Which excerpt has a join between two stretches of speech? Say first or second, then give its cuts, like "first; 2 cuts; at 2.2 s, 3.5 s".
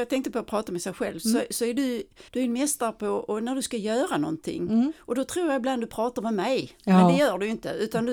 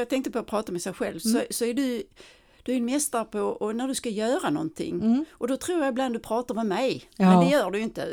first; 1 cut; at 2.3 s